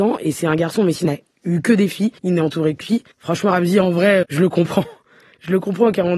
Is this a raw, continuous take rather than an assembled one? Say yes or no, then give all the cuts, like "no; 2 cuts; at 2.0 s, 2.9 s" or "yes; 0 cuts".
no; 5 cuts; at 1.0 s, 2.2 s, 2.8 s, 3.1 s, 4.2 s